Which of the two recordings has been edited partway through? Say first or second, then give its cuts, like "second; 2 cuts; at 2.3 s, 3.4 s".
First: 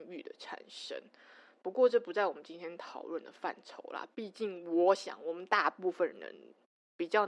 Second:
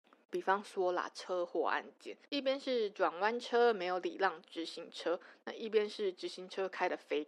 second; 1 cut; at 2.3 s